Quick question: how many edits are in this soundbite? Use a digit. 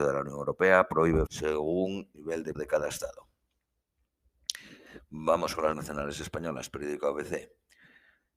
4